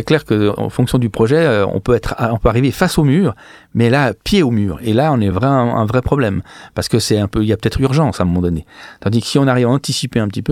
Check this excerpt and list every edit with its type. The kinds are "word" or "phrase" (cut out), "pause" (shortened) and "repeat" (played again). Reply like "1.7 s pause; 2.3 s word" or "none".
none